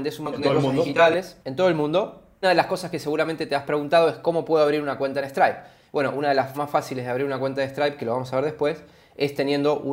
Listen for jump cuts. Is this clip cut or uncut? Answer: cut